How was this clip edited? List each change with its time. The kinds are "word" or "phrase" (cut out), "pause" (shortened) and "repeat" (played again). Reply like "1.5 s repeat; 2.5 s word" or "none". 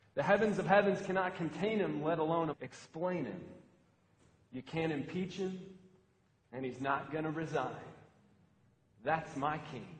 2.5 s word